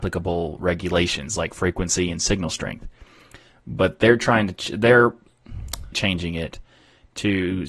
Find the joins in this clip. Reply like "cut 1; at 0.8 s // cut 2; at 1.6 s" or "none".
cut 1; at 5.9 s